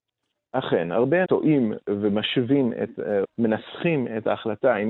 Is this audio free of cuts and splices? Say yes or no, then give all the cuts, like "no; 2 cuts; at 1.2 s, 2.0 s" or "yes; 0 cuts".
no; 2 cuts; at 1.2 s, 3.2 s